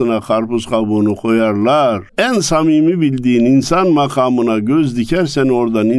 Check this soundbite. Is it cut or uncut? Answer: cut